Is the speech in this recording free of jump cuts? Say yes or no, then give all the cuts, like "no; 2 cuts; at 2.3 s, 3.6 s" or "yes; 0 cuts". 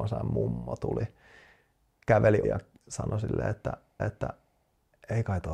no; 2 cuts; at 2.4 s, 4.0 s